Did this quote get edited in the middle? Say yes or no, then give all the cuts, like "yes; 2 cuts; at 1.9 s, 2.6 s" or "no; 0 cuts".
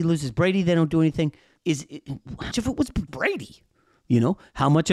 yes; 3 cuts; at 1.6 s, 2.5 s, 3.1 s